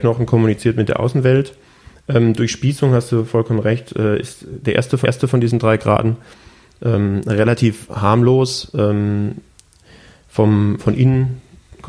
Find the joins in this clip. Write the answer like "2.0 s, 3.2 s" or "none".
5.0 s, 10.8 s

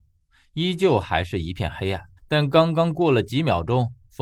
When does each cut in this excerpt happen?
2.2 s

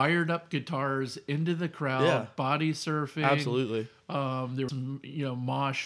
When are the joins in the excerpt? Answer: 4.7 s

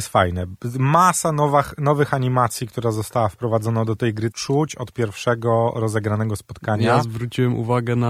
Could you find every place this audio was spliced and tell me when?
4.3 s

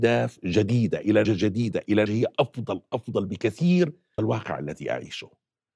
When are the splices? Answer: 1.2 s, 2.1 s, 4.2 s

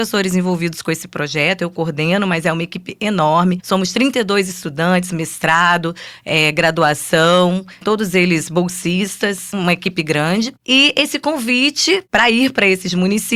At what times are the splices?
7.8 s, 9.5 s

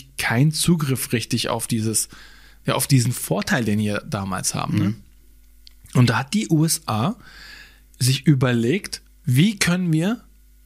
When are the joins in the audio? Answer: none

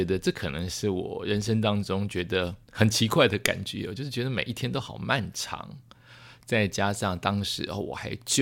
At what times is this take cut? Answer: 2.6 s

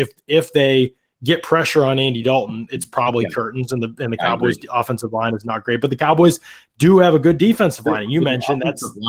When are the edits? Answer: none

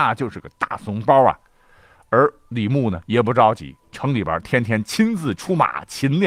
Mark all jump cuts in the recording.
none

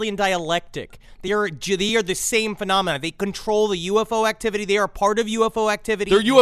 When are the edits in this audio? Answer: none

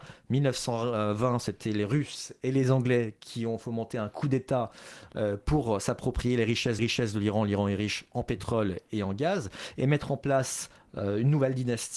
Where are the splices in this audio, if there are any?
6.8 s

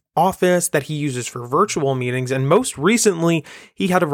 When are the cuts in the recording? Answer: none

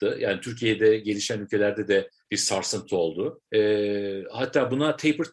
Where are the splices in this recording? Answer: 3.5 s

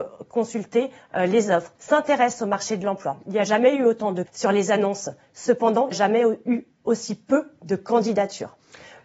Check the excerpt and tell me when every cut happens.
1.7 s, 4.3 s, 5.9 s

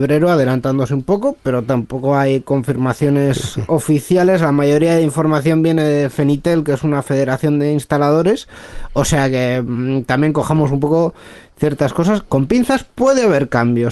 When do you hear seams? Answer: none

